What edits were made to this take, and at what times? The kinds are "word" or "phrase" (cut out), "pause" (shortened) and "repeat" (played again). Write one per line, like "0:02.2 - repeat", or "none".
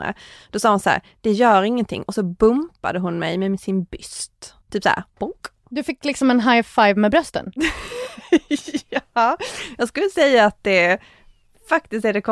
0:04.6 - pause
0:05.1 - pause

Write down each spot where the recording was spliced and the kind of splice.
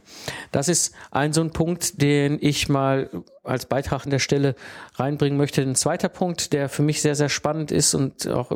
0:04.1 - phrase

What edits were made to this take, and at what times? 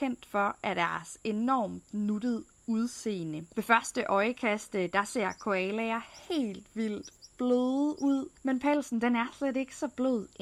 0:03.5 - pause
0:08.4 - pause

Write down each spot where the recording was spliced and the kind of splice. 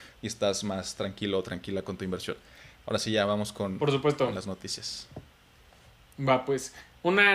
none

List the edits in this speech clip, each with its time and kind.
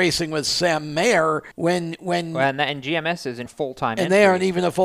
0:01.5 - pause
0:03.5 - word

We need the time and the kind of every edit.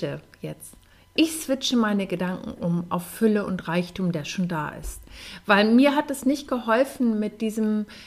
none

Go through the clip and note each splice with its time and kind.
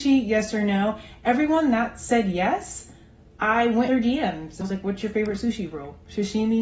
0:03.9 - word
0:04.6 - word

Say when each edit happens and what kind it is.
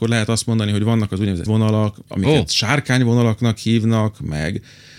0:01.5 - word

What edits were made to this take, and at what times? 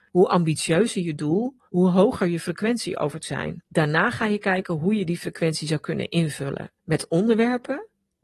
0:01.7 - pause
0:03.2 - phrase
0:03.7 - pause
0:06.8 - pause

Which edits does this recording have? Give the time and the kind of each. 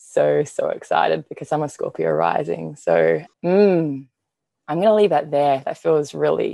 0:03.3 - pause

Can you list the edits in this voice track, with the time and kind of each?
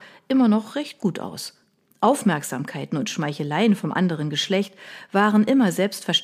none

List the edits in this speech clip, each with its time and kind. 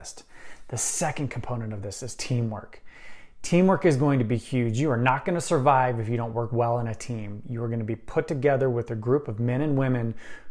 none

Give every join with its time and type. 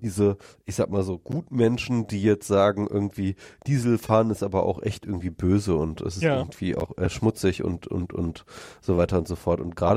none

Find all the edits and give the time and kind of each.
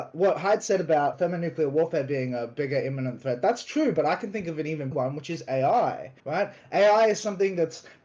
0:01.1 - word
0:04.9 - word
0:06.2 - pause

